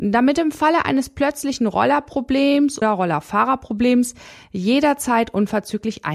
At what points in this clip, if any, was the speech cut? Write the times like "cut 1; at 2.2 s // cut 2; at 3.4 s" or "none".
cut 1; at 2.8 s